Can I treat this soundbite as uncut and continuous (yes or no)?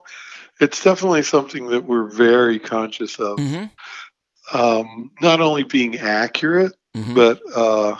yes